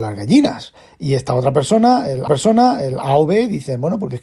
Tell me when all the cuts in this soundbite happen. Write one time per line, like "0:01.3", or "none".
0:02.3